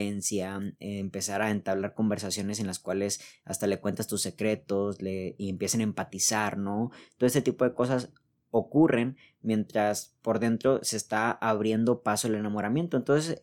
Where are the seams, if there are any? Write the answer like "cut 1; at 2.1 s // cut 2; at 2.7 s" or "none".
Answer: none

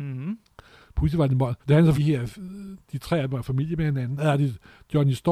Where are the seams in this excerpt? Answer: cut 1; at 1.6 s // cut 2; at 1.9 s

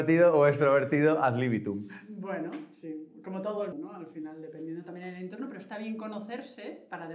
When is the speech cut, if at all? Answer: cut 1; at 3.7 s

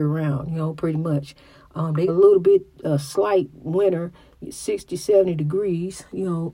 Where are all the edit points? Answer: cut 1; at 2.1 s // cut 2; at 3.5 s // cut 3; at 4.4 s

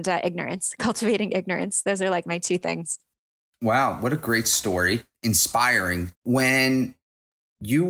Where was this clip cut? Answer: cut 1; at 6.1 s

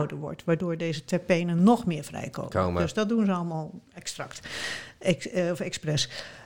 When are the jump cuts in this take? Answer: none

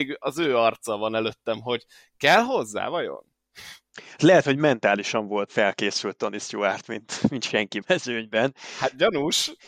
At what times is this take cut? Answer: cut 1; at 5.5 s // cut 2; at 7.8 s

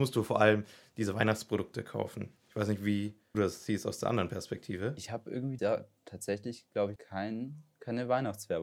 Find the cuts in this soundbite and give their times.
cut 1; at 2.4 s // cut 2; at 3.3 s // cut 3; at 5.6 s // cut 4; at 7.0 s

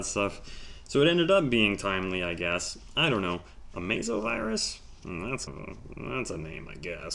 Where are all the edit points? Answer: cut 1; at 5.5 s

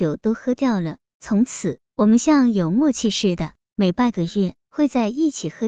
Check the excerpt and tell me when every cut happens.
cut 1; at 1.8 s // cut 2; at 4.6 s

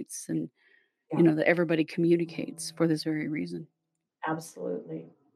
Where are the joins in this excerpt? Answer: none

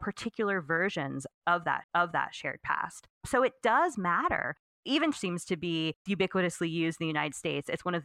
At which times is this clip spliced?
cut 1; at 1.8 s // cut 2; at 3.2 s // cut 3; at 5.1 s // cut 4; at 6.1 s

